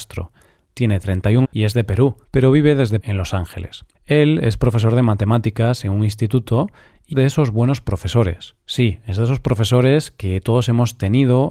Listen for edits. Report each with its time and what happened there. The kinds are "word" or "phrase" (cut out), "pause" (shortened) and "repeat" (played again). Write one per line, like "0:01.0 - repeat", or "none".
0:01.4 - word
0:02.2 - pause
0:03.0 - word
0:03.9 - pause
0:07.1 - word
0:08.6 - pause